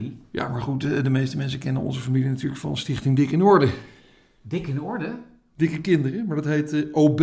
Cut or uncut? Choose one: uncut